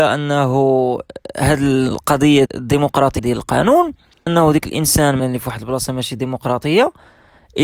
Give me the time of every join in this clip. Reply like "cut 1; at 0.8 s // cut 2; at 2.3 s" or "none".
cut 1; at 2.5 s // cut 2; at 3.2 s // cut 3; at 4.3 s // cut 4; at 5.2 s